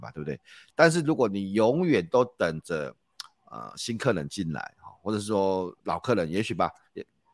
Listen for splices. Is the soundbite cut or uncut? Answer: cut